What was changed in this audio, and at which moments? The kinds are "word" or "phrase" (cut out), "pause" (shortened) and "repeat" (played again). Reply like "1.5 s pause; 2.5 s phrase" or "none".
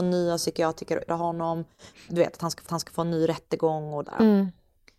1.1 s word; 2.7 s repeat; 4.0 s phrase